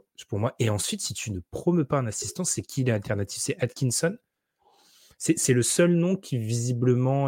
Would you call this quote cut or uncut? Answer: uncut